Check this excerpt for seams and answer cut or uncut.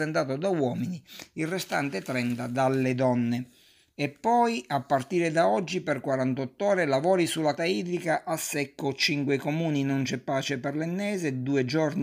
cut